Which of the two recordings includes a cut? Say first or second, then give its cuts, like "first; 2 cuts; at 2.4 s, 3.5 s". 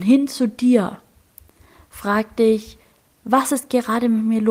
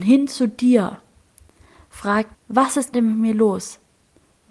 second; 2 cuts; at 2.3 s, 2.9 s